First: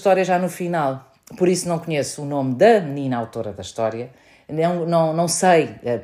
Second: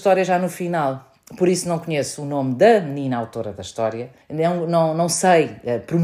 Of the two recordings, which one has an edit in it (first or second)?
second